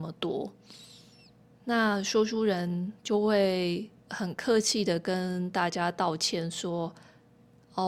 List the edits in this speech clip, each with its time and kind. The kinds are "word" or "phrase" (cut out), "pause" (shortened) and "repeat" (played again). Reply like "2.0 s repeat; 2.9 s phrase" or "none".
4.0 s pause